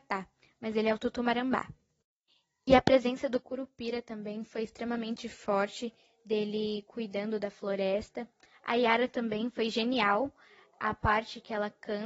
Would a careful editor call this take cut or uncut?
uncut